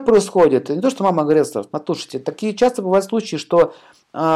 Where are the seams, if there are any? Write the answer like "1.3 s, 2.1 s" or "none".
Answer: none